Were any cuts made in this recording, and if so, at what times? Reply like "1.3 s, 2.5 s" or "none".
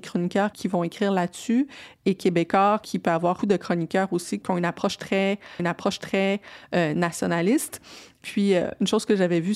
3.4 s, 5.6 s

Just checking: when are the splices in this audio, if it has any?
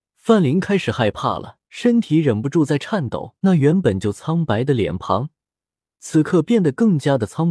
1.6 s, 3.4 s

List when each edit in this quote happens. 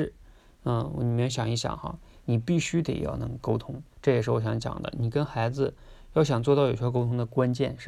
3.9 s

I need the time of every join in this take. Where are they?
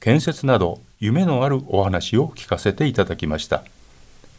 none

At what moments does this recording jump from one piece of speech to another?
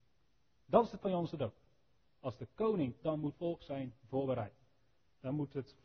1.0 s, 3.0 s, 3.3 s

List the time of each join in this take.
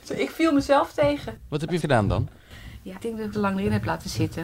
1.8 s, 3.0 s, 3.3 s

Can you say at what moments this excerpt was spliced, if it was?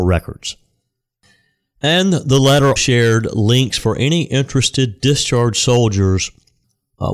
2.8 s

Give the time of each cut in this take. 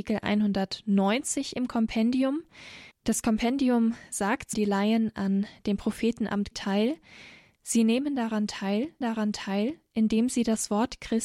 2.9 s, 4.5 s, 6.5 s, 9.0 s

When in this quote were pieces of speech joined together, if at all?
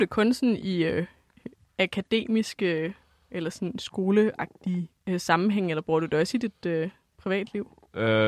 5.0 s

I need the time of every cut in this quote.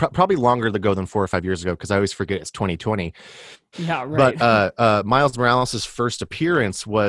none

